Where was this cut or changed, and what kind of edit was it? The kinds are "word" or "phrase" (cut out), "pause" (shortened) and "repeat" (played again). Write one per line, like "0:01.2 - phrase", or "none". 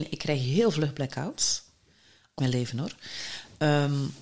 0:02.4 - word